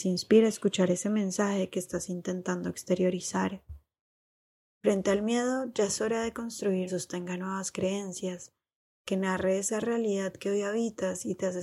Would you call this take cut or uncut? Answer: cut